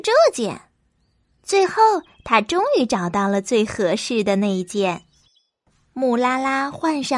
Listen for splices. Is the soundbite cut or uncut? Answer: uncut